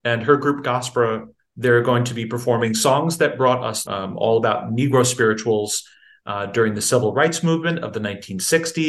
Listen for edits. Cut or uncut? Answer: cut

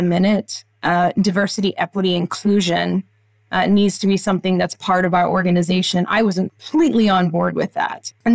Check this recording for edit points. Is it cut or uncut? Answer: uncut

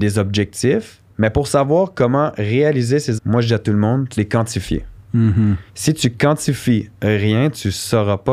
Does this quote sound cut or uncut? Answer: cut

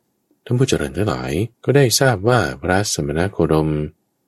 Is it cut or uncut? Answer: cut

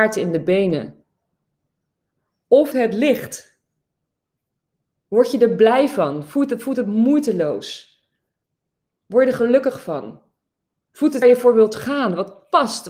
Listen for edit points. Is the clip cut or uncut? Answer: cut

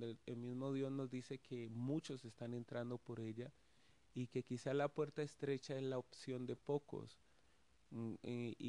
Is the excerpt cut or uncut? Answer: uncut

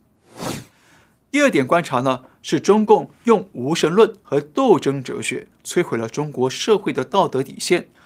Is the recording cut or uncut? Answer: uncut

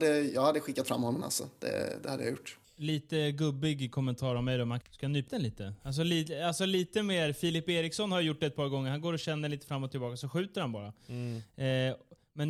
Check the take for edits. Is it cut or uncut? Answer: cut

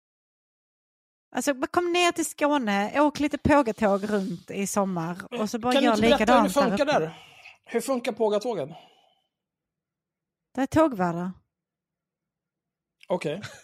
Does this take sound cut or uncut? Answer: uncut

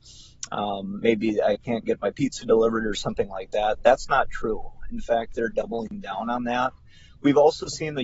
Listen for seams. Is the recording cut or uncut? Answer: uncut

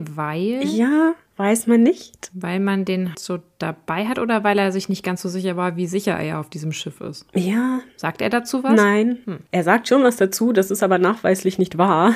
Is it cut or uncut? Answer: cut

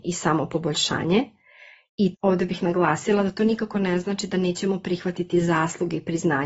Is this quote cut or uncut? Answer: cut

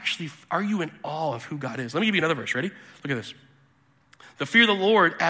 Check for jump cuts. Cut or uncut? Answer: uncut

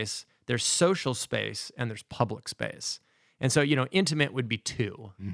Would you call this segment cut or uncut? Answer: uncut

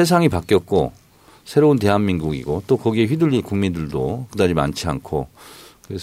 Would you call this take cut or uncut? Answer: uncut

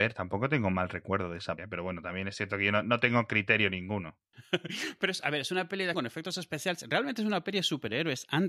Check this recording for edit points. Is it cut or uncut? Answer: cut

